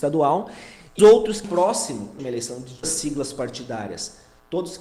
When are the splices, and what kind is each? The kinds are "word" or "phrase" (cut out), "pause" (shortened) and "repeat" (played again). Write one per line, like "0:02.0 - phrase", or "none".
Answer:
0:01.0 - word
0:01.4 - word
0:02.2 - word
0:02.8 - word